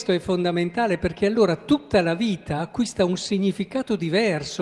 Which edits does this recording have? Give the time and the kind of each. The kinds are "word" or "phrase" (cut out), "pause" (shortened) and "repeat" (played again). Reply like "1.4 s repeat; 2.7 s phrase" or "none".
none